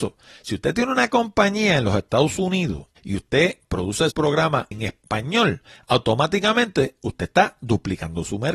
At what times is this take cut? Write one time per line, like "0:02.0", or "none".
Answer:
0:03.0
0:04.1
0:04.7